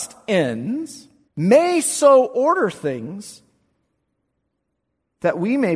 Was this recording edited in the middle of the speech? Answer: yes; 1 cut; at 1.3 s

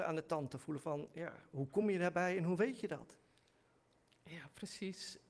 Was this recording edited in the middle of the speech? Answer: no; 0 cuts

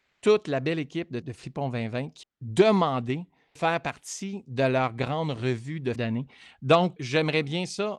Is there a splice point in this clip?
yes; 5 cuts; at 1.2 s, 2.2 s, 3.6 s, 6.0 s, 7.0 s

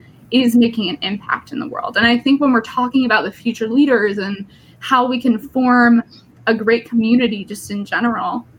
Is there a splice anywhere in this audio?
no; 0 cuts

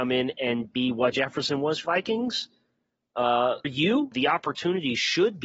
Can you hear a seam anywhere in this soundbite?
yes; 4 cuts; at 1.1 s, 1.8 s, 3.6 s, 4.1 s

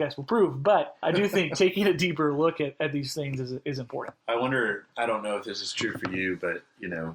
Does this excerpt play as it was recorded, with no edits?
no; 2 cuts; at 1.0 s, 4.2 s

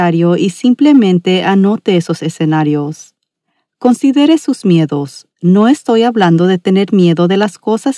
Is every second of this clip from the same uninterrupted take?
yes; 0 cuts

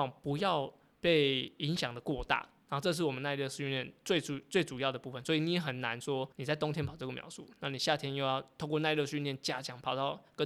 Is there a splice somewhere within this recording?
yes; 1 cut; at 6.3 s

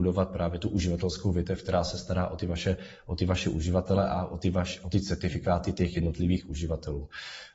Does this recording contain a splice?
no; 0 cuts

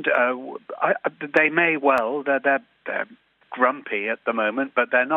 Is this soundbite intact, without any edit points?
no; 1 cut; at 2.8 s

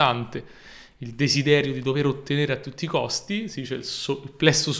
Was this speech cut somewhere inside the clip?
no; 0 cuts

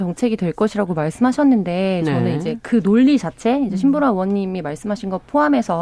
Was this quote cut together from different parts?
no; 0 cuts

